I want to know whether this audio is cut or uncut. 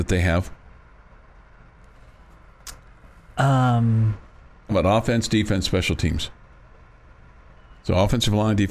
cut